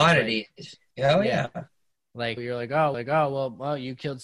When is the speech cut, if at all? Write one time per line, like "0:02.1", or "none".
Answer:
0:02.4
0:02.9